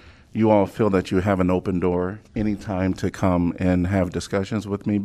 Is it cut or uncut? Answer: cut